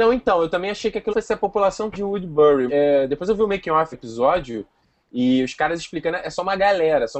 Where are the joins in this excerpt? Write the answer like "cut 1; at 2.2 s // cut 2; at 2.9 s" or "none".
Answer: cut 1; at 1.1 s // cut 2; at 1.9 s // cut 3; at 2.7 s // cut 4; at 3.9 s